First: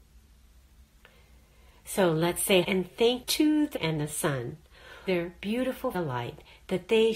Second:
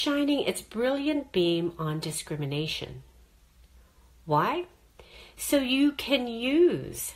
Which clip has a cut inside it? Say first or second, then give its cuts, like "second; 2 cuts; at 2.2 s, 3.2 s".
first; 5 cuts; at 2.6 s, 3.2 s, 3.8 s, 5.1 s, 5.9 s